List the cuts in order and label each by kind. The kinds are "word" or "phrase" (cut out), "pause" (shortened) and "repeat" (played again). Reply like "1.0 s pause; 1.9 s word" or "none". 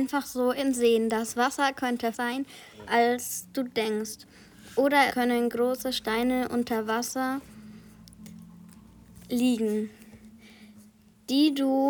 2.1 s word; 5.1 s word